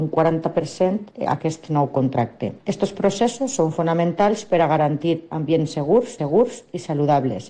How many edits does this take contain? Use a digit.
1